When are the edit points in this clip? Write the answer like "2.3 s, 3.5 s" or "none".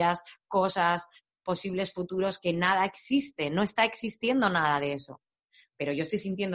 none